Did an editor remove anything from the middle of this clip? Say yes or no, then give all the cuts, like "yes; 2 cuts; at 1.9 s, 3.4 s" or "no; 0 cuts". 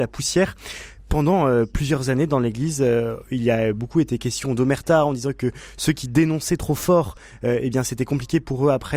no; 0 cuts